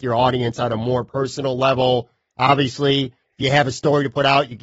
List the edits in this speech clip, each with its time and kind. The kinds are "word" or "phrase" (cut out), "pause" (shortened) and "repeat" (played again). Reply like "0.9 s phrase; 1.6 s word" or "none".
none